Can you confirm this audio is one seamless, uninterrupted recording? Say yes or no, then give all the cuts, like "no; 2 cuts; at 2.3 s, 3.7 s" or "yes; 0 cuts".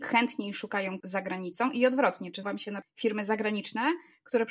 no; 3 cuts; at 1.0 s, 2.4 s, 2.8 s